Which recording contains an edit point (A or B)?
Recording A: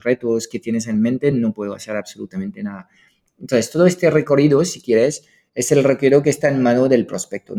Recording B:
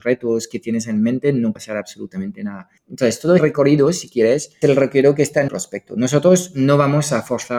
B